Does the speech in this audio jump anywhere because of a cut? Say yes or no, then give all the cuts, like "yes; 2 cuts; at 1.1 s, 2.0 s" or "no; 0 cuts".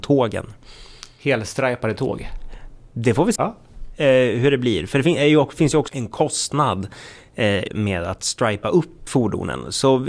yes; 4 cuts; at 3.4 s, 5.9 s, 7.7 s, 9.1 s